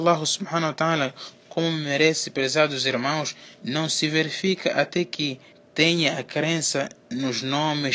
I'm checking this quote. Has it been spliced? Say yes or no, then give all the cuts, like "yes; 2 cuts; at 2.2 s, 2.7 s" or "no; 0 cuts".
yes; 2 cuts; at 3.5 s, 5.5 s